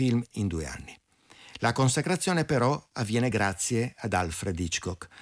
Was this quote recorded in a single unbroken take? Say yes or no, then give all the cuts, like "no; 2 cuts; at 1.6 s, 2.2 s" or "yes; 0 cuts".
yes; 0 cuts